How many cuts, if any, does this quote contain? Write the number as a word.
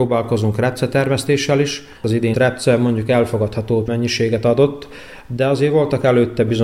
three